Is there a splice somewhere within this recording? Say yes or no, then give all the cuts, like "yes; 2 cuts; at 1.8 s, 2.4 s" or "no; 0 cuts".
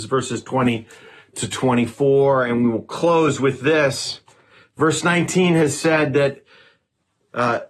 no; 0 cuts